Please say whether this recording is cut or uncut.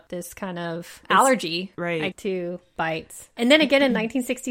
cut